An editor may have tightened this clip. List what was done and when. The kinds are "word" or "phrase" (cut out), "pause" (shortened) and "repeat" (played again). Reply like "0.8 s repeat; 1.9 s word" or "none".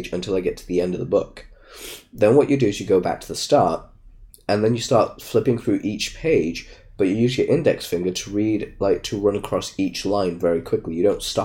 none